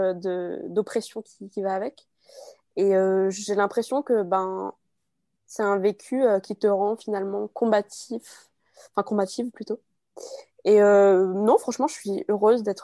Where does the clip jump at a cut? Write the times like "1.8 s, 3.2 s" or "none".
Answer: none